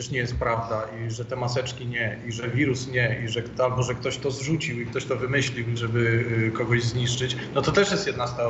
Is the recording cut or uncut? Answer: cut